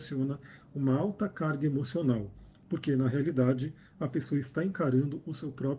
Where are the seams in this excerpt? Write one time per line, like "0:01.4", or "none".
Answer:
none